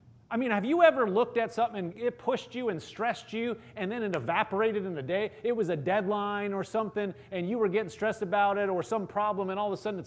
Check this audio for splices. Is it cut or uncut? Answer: cut